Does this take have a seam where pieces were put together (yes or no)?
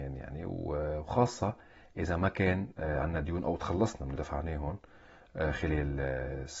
yes